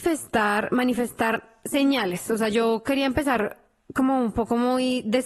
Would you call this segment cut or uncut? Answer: uncut